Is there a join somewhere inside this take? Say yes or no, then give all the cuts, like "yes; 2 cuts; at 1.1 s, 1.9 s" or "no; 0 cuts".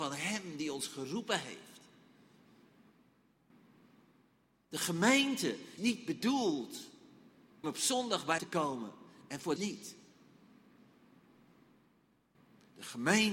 yes; 4 cuts; at 5.8 s, 7.6 s, 8.4 s, 9.6 s